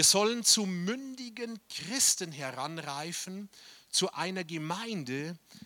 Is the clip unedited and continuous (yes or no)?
yes